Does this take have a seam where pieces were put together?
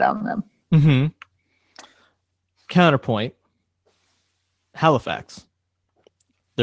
no; 0 cuts

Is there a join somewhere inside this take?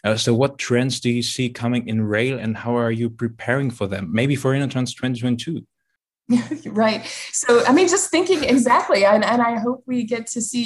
no; 0 cuts

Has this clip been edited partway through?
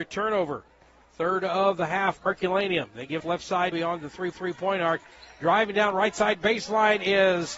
yes; 4 cuts; at 2.2 s, 3.2 s, 3.7 s, 4.3 s

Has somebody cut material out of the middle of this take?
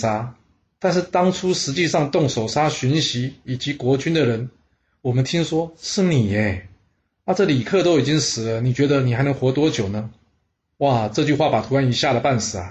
no; 0 cuts

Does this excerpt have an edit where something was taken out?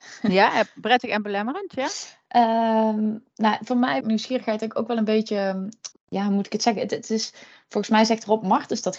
yes; 2 cuts; at 4.0 s, 5.9 s

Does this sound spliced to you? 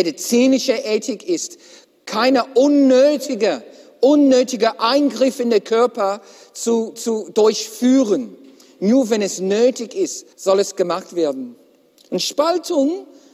yes; 1 cut; at 10.3 s

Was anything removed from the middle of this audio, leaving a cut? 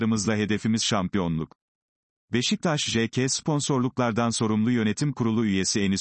no; 0 cuts

